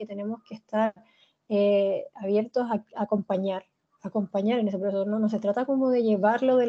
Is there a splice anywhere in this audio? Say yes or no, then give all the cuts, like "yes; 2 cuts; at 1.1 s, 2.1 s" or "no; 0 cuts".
no; 0 cuts